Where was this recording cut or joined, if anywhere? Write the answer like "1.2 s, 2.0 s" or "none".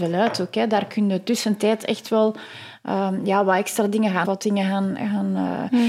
4.2 s